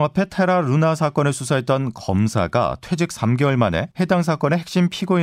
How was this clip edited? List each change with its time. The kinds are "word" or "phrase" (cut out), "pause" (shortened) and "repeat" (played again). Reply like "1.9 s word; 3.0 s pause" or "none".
3.9 s pause